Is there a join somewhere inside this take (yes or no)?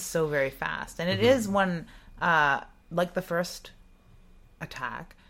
no